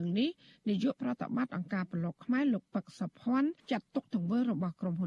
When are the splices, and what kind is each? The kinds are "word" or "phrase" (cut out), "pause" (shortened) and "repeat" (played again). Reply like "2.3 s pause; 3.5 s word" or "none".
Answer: 3.6 s pause

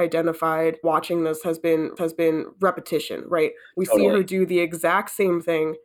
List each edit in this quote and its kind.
2.0 s repeat

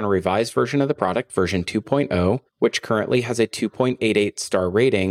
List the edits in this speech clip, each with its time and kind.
2.5 s pause

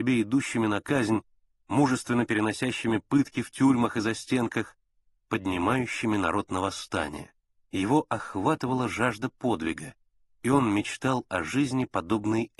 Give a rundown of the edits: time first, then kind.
none

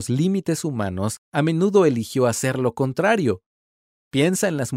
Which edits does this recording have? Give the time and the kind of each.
none

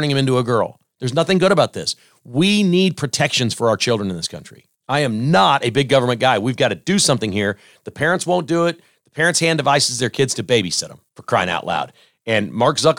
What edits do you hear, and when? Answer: 4.7 s pause; 11.1 s pause

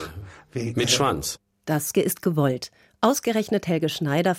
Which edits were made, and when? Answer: 1.9 s word

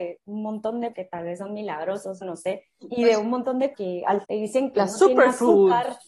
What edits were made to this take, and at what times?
0.9 s word; 2.2 s word; 2.8 s word; 3.7 s word; 4.2 s word

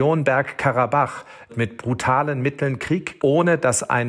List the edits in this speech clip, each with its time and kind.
1.5 s word; 3.2 s word

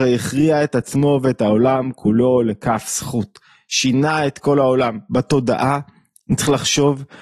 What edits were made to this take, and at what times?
none

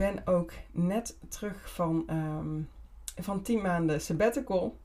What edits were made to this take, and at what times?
none

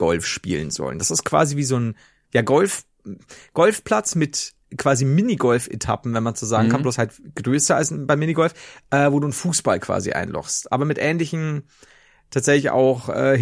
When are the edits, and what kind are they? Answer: none

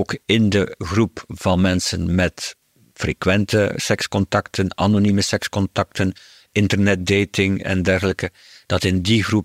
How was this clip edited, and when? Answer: none

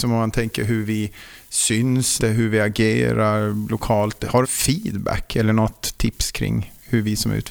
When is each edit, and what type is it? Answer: 2.2 s word; 4.4 s phrase

